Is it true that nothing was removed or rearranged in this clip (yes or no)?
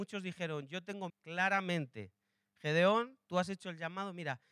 no